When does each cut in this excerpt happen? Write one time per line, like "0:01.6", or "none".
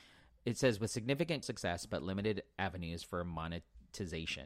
0:01.4